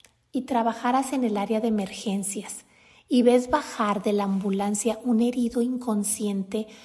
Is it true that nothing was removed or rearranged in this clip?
yes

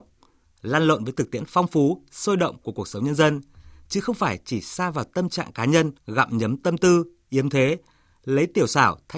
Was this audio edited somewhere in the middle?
yes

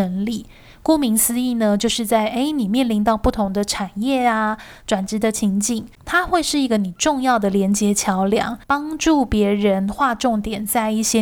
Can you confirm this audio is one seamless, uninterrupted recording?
no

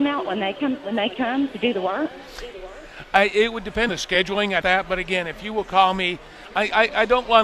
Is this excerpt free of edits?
no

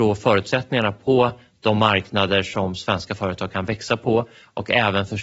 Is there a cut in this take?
no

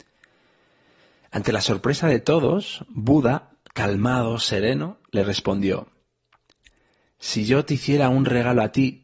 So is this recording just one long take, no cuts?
yes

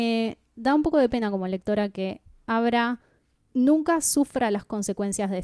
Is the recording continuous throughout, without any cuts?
yes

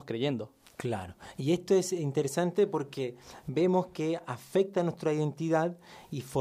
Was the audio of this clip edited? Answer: no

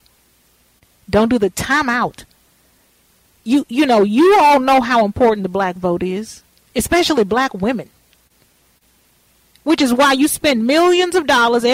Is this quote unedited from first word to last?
yes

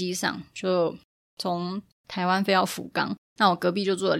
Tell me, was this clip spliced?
yes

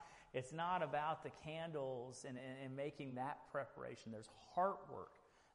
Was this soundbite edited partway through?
no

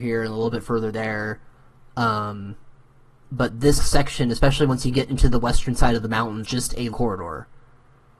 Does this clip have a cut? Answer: yes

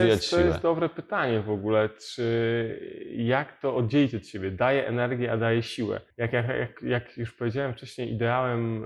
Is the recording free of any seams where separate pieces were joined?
no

